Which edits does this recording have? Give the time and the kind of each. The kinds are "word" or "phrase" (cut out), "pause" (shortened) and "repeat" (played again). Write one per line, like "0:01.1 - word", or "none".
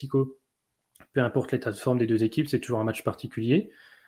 none